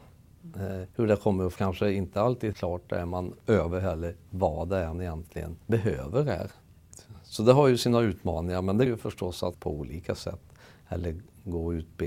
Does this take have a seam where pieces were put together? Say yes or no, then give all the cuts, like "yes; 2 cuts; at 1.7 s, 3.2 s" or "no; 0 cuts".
yes; 7 cuts; at 0.9 s, 1.6 s, 2.5 s, 4.9 s, 5.6 s, 8.9 s, 9.5 s